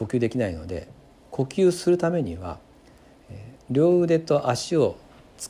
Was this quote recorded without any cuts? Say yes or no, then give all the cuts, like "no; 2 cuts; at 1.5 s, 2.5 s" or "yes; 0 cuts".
yes; 0 cuts